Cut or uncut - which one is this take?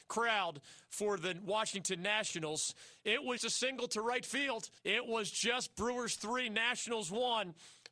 cut